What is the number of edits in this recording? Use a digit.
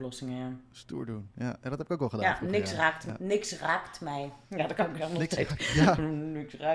1